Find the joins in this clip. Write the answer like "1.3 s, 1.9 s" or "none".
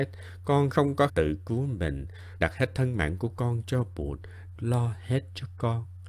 1.1 s, 2.4 s, 4.6 s